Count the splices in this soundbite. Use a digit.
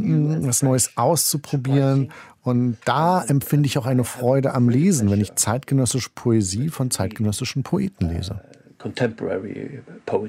0